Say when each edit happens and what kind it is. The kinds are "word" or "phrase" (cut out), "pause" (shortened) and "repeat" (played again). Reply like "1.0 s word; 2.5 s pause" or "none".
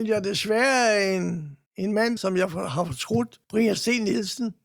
1.7 s pause; 2.2 s word; 3.4 s pause

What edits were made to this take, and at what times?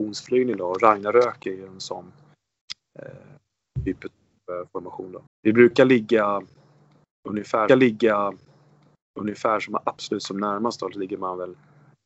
5.3 s pause; 7.7 s repeat

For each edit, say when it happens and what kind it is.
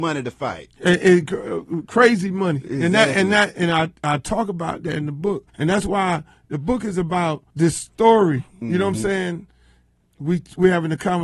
3.5 s word; 5.5 s pause; 7.5 s pause

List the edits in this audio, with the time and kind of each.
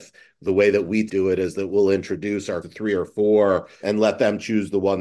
1.1 s word; 2.6 s word; 3.8 s word

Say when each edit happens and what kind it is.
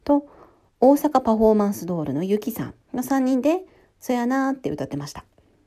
2.8 s pause; 3.7 s pause

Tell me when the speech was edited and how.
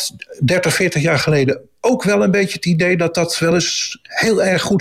none

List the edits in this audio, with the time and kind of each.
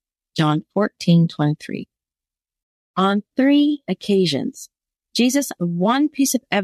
3.8 s word; 5.6 s word

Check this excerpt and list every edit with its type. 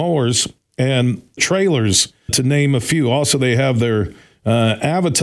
1.4 s word; 2.3 s word

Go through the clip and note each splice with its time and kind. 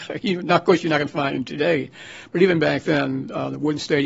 none

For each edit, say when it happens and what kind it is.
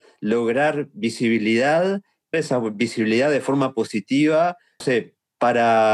2.3 s word; 4.8 s word

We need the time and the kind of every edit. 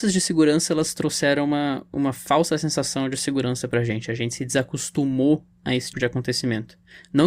5.9 s word

